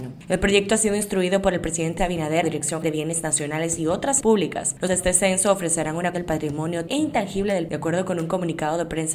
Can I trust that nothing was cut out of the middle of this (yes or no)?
no